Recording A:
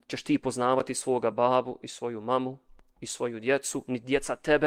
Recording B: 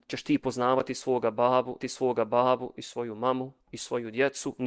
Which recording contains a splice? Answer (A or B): B